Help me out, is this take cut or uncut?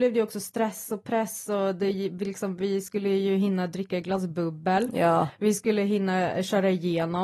uncut